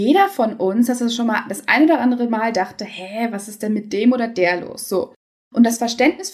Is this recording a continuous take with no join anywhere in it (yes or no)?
yes